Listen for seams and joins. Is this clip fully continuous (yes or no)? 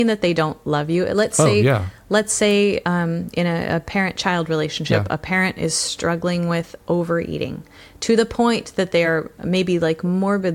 yes